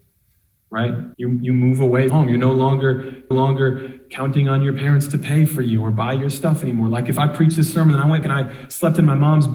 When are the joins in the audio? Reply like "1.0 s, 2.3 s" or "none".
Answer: 1.1 s, 2.1 s, 3.3 s, 8.2 s